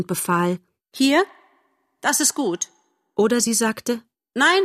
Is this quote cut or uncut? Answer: uncut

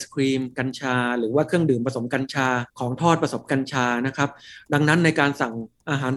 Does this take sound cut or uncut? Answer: cut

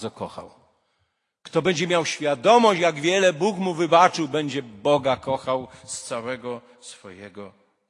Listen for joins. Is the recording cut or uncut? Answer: uncut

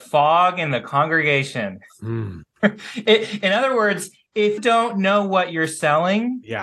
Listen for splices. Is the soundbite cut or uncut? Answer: cut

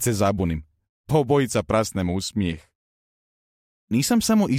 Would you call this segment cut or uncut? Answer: uncut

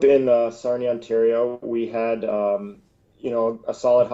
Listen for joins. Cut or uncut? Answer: uncut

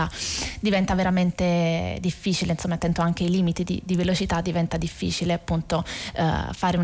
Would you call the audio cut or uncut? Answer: uncut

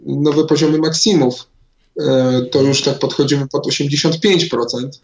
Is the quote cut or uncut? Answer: uncut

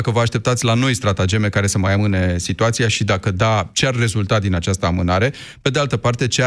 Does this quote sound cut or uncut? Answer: uncut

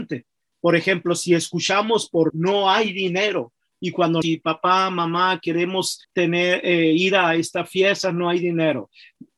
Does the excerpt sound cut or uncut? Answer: cut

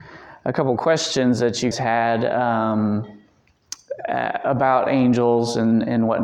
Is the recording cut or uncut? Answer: cut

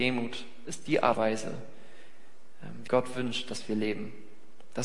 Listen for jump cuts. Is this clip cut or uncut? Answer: cut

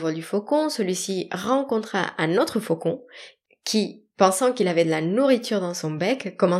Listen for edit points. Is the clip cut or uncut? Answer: uncut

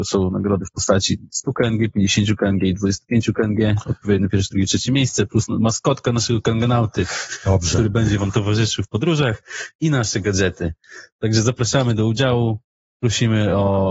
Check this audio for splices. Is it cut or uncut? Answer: uncut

